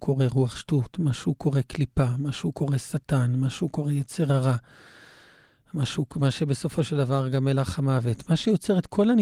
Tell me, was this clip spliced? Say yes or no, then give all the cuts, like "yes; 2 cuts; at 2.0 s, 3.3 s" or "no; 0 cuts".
no; 0 cuts